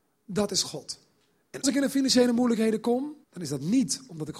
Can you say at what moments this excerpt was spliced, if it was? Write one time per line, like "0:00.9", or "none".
0:01.6
0:03.2